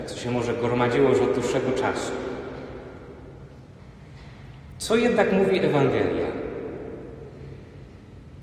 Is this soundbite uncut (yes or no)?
yes